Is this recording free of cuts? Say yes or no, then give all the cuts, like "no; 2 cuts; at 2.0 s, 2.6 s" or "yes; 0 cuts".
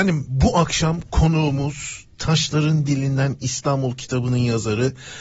yes; 0 cuts